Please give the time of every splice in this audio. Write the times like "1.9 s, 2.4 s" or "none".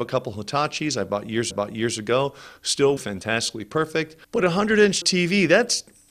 1.5 s, 3.0 s, 4.2 s, 5.0 s